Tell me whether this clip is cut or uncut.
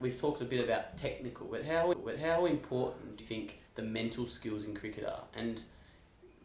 cut